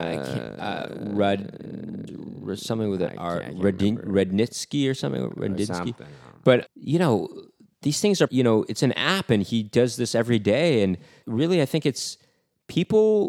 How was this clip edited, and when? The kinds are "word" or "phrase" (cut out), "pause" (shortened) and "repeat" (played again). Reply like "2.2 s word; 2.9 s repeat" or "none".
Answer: 2.1 s word; 6.7 s word; 8.3 s word; 11.2 s word